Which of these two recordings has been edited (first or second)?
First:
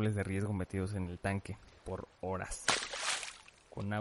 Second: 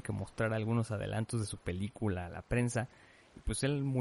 first